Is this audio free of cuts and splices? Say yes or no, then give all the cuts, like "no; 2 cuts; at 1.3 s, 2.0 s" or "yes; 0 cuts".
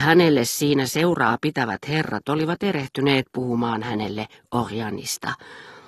yes; 0 cuts